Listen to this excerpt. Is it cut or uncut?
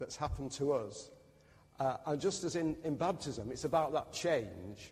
uncut